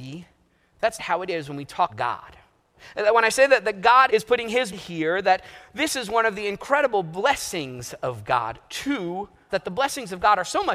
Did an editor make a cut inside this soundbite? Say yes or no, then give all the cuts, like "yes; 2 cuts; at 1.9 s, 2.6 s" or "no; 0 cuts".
yes; 5 cuts; at 1.0 s, 1.9 s, 4.1 s, 4.7 s, 9.5 s